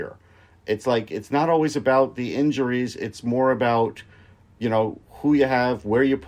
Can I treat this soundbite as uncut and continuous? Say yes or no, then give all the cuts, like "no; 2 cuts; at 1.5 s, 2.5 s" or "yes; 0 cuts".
yes; 0 cuts